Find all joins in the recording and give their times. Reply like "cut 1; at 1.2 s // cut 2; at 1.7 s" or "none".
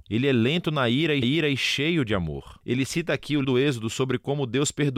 cut 1; at 1.2 s // cut 2; at 3.4 s